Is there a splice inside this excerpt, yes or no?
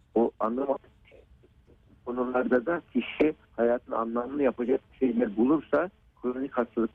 yes